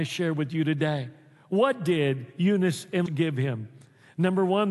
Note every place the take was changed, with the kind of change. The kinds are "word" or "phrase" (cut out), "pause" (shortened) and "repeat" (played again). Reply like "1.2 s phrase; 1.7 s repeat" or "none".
3.1 s word

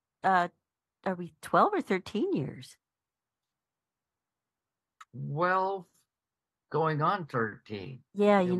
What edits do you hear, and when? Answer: none

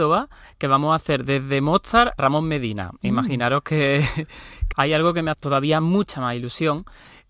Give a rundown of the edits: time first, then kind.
2.2 s word; 4.7 s phrase; 5.3 s phrase

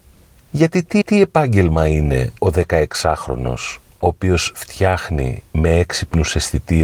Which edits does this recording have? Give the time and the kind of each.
1.0 s repeat; 2.4 s pause; 5.5 s pause

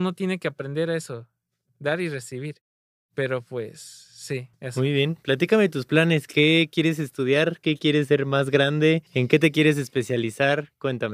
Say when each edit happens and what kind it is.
4.5 s pause; 9.1 s pause

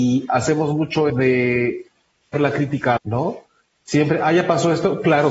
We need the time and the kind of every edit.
1.1 s word; 2.3 s word; 3.0 s phrase

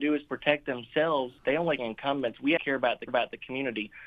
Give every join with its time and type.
1.4 s pause; 1.8 s phrase; 2.6 s word; 3.1 s repeat

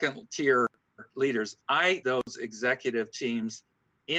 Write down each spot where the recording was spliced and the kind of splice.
2.0 s word

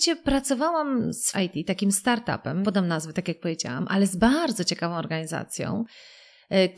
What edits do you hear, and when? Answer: 1.3 s phrase; 2.6 s word

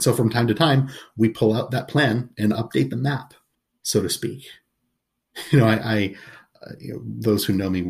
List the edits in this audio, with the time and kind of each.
3.5 s pause

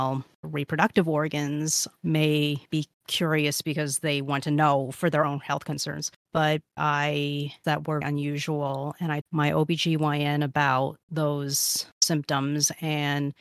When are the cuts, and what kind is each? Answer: 2.7 s pause; 6.8 s word; 7.6 s phrase; 8.0 s word; 9.2 s phrase

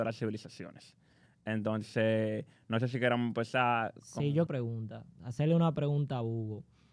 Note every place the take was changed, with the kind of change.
4.5 s phrase

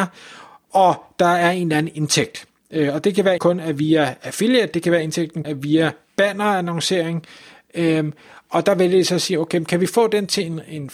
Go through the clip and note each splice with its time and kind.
3.4 s word; 5.4 s word

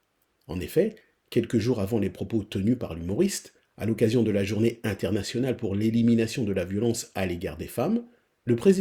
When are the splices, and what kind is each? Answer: none

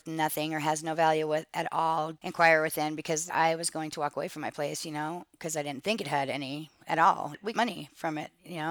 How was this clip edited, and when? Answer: 3.3 s word; 6.8 s word; 7.5 s word

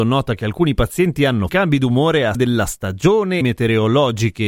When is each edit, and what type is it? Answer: 1.5 s word; 2.3 s word; 3.4 s phrase

